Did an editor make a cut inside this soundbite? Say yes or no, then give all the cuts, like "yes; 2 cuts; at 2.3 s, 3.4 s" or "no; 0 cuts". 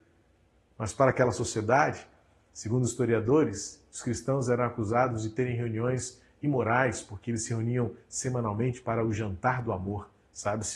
no; 0 cuts